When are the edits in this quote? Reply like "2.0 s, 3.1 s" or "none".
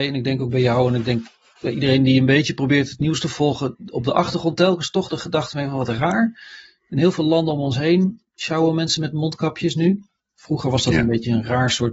none